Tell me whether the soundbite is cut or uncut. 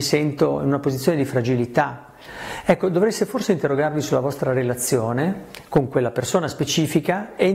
uncut